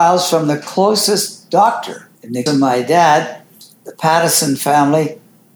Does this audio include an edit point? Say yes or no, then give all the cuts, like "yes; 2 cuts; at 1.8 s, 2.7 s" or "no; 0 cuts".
yes; 2 cuts; at 2.2 s, 2.5 s